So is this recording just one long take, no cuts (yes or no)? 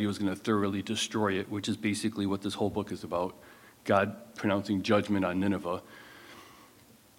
yes